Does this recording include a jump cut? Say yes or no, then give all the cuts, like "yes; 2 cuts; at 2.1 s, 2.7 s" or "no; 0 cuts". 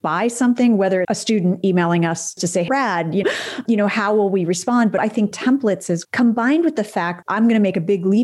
yes; 8 cuts; at 1.0 s, 2.4 s, 2.7 s, 3.2 s, 5.0 s, 5.3 s, 6.0 s, 7.2 s